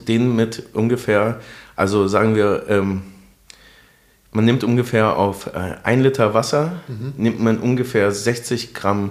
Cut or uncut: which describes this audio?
uncut